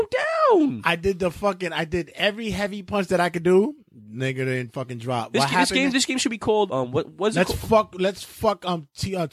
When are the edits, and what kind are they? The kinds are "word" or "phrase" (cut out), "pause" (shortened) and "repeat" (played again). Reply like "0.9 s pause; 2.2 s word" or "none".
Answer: 6.7 s word